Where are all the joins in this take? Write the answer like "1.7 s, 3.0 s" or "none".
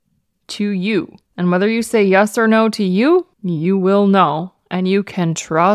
1.2 s, 3.3 s